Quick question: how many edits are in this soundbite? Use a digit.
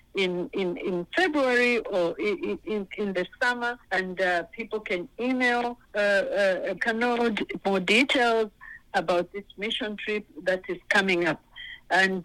5